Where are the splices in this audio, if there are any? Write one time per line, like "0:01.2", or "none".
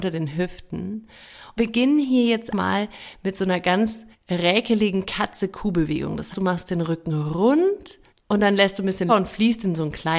0:01.6
0:02.5
0:04.1
0:06.3
0:08.1
0:09.1